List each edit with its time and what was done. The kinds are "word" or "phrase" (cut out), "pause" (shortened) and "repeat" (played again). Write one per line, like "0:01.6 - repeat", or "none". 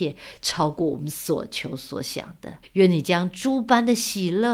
0:02.6 - pause

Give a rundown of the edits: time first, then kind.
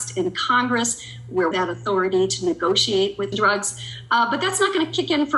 0:01.5 - phrase
0:03.3 - phrase

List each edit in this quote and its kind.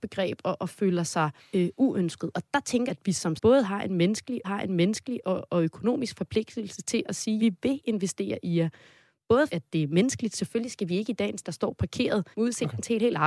0:01.4 - pause
0:02.9 - word
0:03.4 - word
0:04.4 - repeat
0:07.4 - word
0:09.5 - phrase
0:11.4 - phrase
0:12.3 - pause

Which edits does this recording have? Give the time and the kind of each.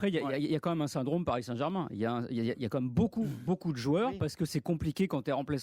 none

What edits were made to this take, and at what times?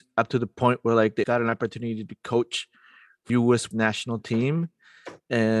0:01.2 - word
0:03.3 - word
0:03.7 - word

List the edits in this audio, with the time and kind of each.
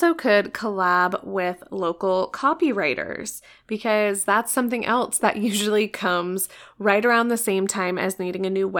none

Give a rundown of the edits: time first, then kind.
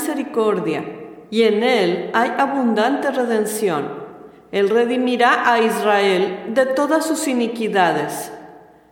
none

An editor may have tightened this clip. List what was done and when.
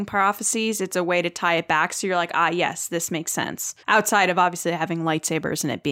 0:03.8 - pause

